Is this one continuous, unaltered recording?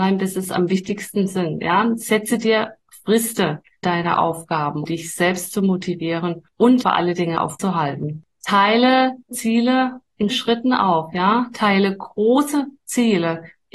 no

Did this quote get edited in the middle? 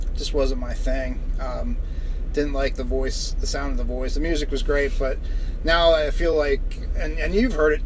no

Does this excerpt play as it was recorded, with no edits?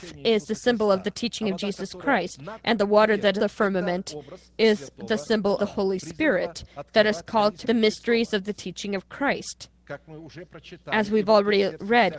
no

